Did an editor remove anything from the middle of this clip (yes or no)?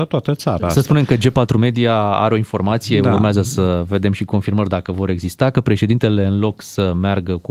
no